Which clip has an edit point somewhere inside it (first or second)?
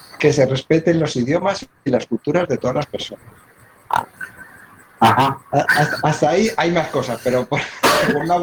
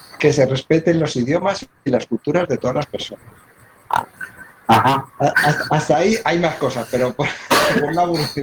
second